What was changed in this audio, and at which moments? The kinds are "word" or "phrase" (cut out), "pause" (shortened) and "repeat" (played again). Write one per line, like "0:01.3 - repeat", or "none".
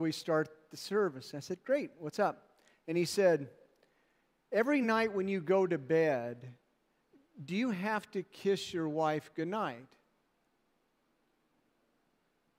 none